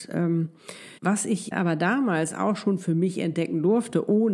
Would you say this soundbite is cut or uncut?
cut